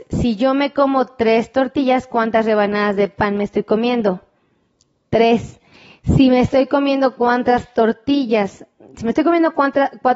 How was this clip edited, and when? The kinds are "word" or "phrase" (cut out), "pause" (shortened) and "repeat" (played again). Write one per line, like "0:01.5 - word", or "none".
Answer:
none